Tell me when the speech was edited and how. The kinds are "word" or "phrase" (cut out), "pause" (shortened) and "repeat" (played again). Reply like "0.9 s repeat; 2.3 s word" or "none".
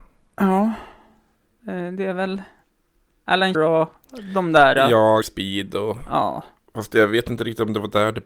3.5 s word; 5.2 s word